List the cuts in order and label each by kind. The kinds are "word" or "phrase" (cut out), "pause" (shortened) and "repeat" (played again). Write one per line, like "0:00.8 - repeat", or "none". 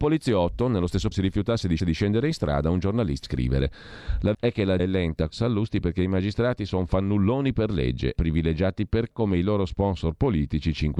0:01.1 - word
0:01.8 - repeat
0:03.2 - word
0:04.3 - word
0:04.8 - word
0:05.3 - word
0:08.2 - word
0:09.1 - word